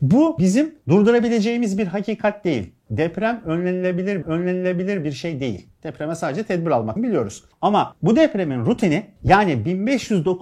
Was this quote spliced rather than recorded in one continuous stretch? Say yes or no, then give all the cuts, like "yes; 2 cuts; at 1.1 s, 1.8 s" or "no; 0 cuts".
yes; 2 cuts; at 4.2 s, 7.0 s